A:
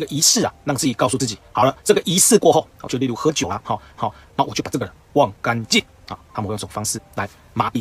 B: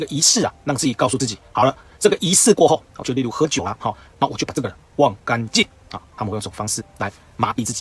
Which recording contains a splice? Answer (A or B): A